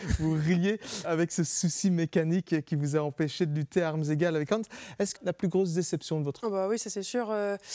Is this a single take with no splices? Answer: no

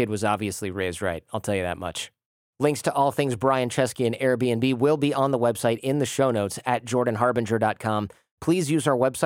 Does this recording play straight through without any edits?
yes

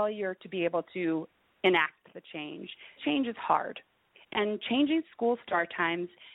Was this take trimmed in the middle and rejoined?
yes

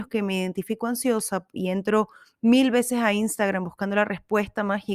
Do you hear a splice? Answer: no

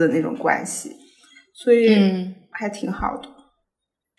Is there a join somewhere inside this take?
no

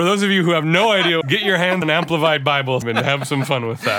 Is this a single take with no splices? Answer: no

